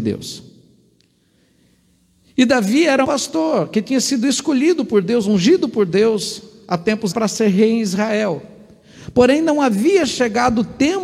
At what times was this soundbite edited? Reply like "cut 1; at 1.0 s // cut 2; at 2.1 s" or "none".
cut 1; at 3.0 s // cut 2; at 7.1 s